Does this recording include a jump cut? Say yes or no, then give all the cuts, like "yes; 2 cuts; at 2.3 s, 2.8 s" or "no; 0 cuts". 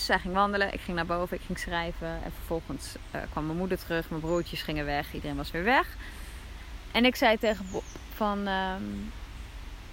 no; 0 cuts